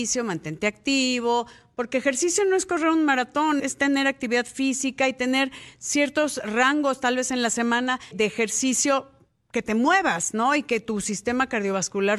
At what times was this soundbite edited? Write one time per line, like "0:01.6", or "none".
0:03.6
0:08.1